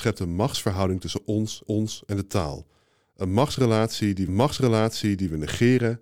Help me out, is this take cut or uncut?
cut